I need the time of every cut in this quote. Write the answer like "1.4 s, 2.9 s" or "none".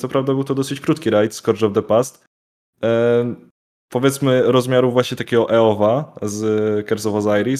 none